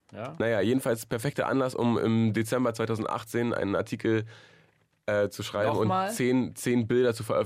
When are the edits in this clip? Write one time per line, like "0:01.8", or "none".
none